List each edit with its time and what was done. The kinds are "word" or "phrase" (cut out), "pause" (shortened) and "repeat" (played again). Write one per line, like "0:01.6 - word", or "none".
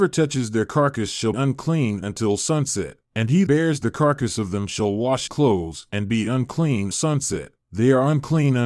0:01.3 - word
0:03.0 - pause
0:03.5 - word
0:05.3 - word
0:06.9 - word
0:07.6 - pause